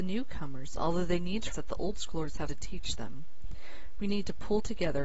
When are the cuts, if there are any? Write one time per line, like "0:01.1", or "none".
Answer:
0:01.5
0:02.5

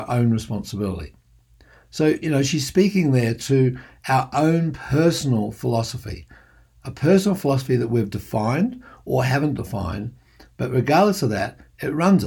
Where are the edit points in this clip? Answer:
none

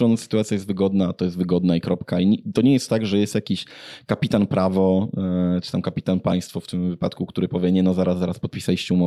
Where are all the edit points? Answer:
none

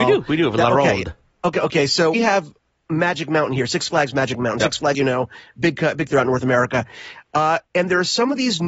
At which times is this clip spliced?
0:02.1
0:04.9
0:06.1

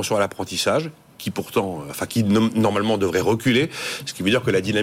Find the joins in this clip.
none

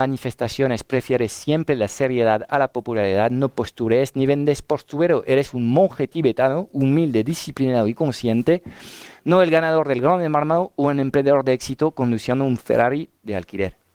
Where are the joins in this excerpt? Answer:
none

